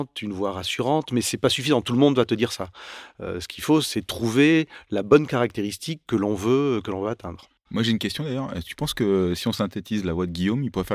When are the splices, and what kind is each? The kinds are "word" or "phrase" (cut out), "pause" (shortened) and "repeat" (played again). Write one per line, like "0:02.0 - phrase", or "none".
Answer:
none